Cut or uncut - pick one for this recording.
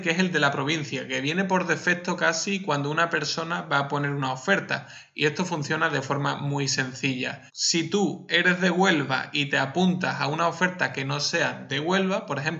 cut